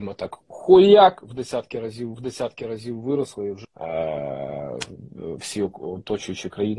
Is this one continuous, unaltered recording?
no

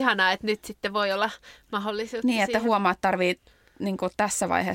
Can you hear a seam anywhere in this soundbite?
no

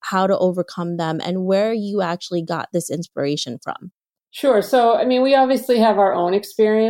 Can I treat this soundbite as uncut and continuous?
yes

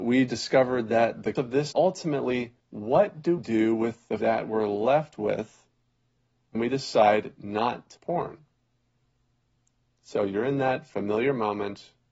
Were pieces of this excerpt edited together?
yes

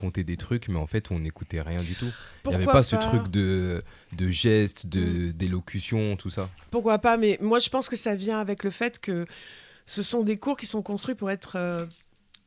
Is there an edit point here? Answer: no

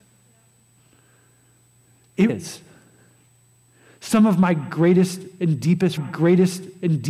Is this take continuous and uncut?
no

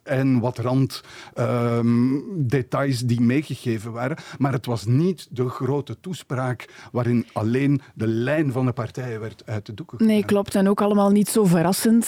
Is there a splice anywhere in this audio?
no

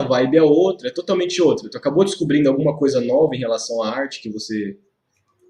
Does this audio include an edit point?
no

